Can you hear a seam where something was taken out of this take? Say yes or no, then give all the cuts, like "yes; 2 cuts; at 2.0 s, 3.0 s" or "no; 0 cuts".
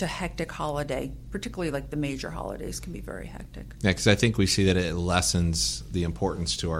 no; 0 cuts